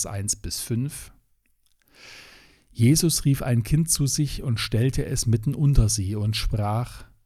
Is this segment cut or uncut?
uncut